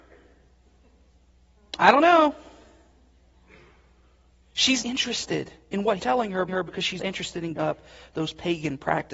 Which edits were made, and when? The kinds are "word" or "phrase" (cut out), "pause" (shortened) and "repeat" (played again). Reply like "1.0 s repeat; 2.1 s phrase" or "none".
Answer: 4.8 s word; 6.0 s word; 6.5 s repeat; 7.0 s word; 7.6 s word